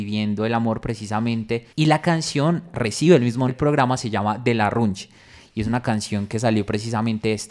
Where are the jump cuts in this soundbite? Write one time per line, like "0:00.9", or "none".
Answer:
0:01.7
0:03.5